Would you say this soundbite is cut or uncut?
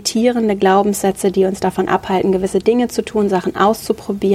uncut